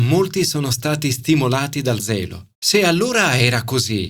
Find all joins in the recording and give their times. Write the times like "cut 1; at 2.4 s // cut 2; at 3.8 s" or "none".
cut 1; at 2.0 s // cut 2; at 2.5 s